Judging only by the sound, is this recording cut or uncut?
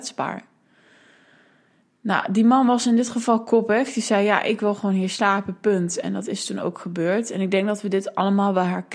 uncut